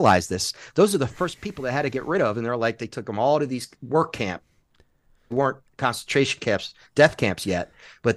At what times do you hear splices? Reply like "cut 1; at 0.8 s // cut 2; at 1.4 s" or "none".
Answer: none

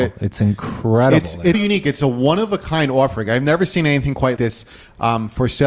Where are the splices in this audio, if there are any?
cut 1; at 1.5 s // cut 2; at 4.4 s

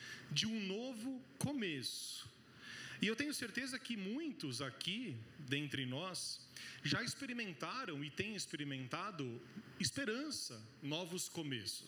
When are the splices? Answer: none

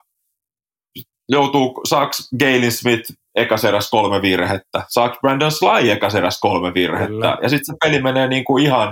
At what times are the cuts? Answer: none

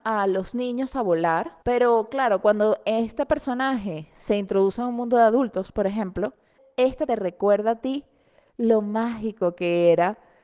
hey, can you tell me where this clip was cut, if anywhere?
cut 1; at 1.6 s // cut 2; at 7.1 s

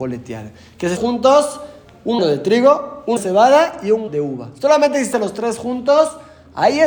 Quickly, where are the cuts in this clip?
cut 1; at 1.0 s // cut 2; at 2.2 s // cut 3; at 3.2 s // cut 4; at 4.1 s // cut 5; at 5.1 s

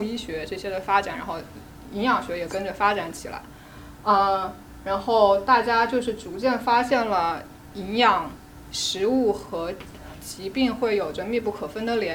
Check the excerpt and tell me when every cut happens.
none

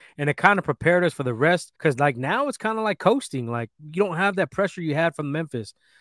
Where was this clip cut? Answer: cut 1; at 1.7 s // cut 2; at 3.8 s

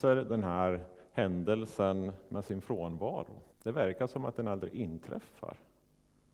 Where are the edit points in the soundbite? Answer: cut 1; at 3.5 s

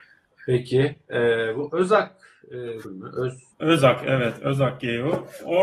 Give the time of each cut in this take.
cut 1; at 2.8 s // cut 2; at 3.5 s

